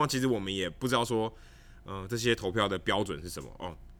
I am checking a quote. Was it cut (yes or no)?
no